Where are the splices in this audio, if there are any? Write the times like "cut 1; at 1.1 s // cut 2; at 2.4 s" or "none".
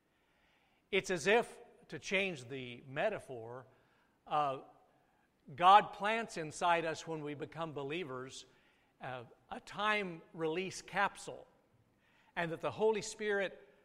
none